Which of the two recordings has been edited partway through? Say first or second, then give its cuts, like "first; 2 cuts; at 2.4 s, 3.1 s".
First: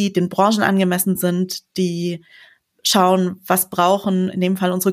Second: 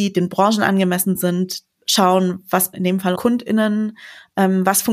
second; 3 cuts; at 1.7 s, 2.7 s, 3.2 s